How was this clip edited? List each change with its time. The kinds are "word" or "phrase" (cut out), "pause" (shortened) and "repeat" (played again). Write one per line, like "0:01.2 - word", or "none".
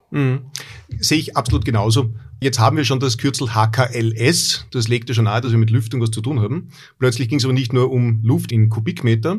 none

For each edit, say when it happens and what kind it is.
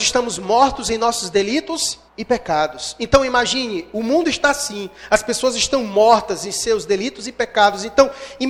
0:02.1 - pause

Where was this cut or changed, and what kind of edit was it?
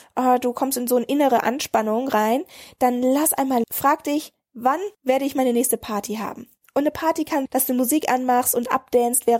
0:03.6 - phrase
0:04.9 - pause
0:07.5 - word

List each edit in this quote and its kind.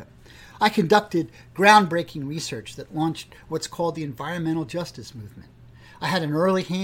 none

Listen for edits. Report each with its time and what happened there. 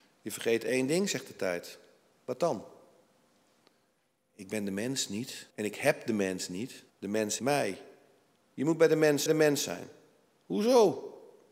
0:05.5 - pause
0:06.9 - pause
0:07.4 - word
0:09.3 - repeat

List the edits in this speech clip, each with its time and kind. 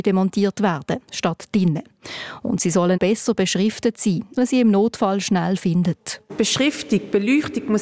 0:02.9 - word
0:04.4 - word

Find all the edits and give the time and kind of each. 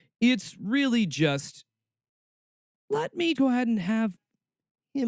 0:03.4 - word

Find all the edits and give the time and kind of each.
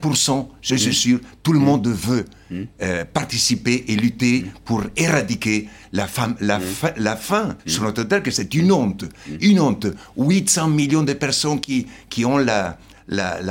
0:07.6 - pause

